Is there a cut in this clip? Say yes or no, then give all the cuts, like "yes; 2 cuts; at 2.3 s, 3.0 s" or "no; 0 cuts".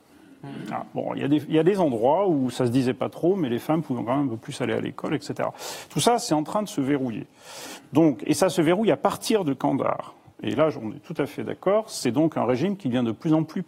no; 0 cuts